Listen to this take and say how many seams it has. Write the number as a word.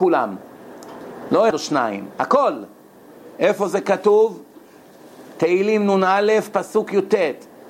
one